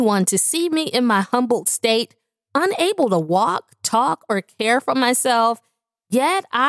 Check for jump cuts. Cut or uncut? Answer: uncut